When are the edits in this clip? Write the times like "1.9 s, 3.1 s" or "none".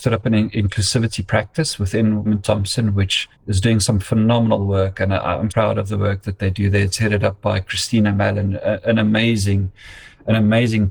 2.3 s, 3.3 s, 5.5 s